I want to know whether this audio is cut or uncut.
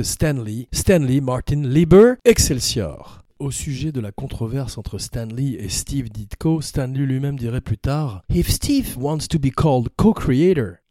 uncut